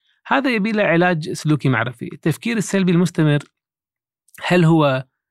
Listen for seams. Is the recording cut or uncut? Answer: uncut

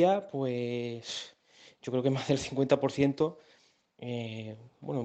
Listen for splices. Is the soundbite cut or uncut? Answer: uncut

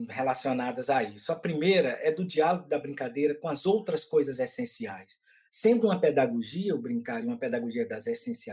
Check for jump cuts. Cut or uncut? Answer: uncut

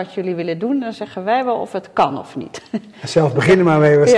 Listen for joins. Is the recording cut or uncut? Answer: uncut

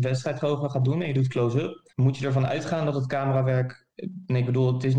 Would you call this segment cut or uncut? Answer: cut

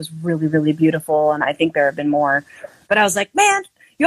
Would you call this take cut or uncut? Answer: uncut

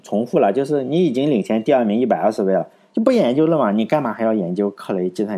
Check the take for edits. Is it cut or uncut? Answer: uncut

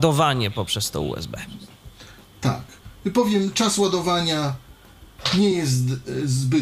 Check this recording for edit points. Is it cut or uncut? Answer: uncut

